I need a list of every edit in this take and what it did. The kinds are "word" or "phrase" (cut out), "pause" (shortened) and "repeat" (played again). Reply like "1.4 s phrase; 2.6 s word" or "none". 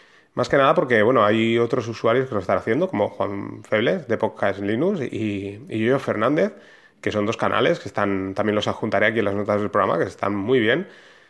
none